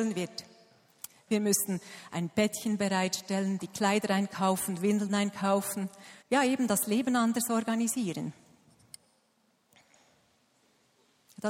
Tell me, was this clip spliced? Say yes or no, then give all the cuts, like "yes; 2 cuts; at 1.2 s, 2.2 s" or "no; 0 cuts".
yes; 1 cut; at 6.2 s